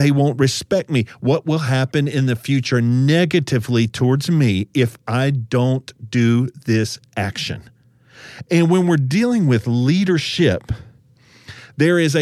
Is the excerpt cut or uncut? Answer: uncut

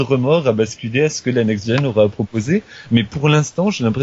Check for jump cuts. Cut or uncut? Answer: uncut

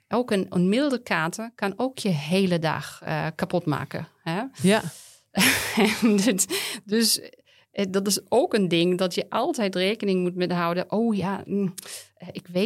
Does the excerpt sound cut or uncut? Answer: uncut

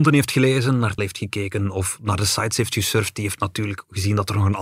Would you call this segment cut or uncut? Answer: cut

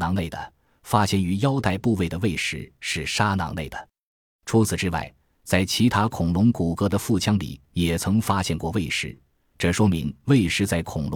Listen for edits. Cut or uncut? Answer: uncut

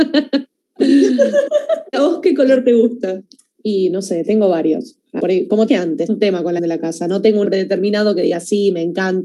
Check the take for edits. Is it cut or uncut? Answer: cut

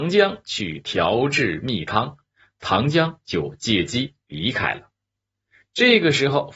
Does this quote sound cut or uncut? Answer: uncut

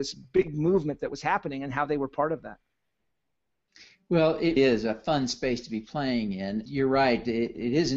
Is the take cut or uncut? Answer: cut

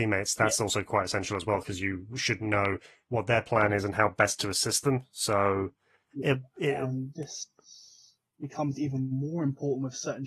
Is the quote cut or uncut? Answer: uncut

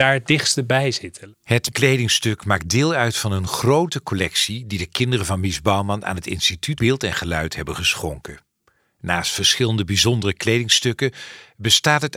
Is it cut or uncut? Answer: cut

